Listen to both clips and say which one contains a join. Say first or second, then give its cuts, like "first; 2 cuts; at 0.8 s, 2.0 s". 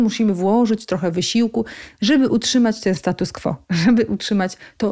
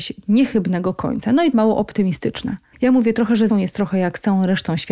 second; 3 cuts; at 1.5 s, 2.7 s, 3.5 s